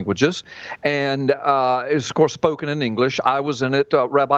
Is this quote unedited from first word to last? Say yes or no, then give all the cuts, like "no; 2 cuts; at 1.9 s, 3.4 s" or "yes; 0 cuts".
yes; 0 cuts